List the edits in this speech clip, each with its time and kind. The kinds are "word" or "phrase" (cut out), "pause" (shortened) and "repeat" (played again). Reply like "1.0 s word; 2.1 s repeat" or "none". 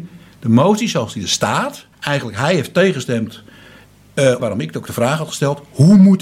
1.9 s pause; 4.4 s phrase